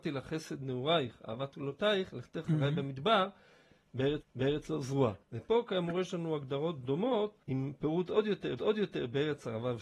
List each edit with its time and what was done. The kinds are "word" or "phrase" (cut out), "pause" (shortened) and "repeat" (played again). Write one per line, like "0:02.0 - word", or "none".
0:04.2 - repeat
0:05.2 - pause
0:07.4 - pause
0:08.6 - repeat